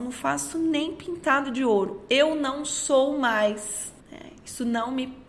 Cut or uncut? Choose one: cut